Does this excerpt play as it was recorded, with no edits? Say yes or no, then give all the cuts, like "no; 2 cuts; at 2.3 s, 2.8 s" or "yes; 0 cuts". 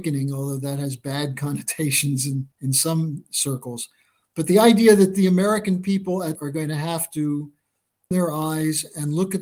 no; 3 cuts; at 2.5 s, 6.3 s, 8.1 s